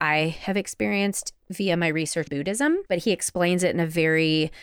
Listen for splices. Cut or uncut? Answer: cut